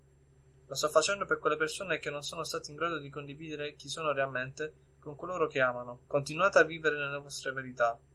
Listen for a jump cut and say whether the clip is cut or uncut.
cut